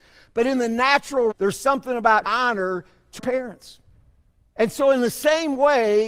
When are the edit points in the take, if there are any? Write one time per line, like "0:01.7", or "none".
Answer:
0:01.3
0:02.2
0:03.2